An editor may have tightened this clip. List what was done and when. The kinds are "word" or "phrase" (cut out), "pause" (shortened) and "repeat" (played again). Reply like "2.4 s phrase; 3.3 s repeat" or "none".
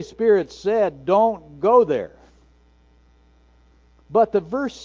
none